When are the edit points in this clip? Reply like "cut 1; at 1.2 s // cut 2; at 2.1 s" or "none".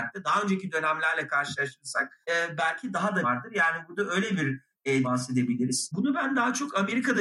cut 1; at 2.2 s // cut 2; at 3.2 s // cut 3; at 5.0 s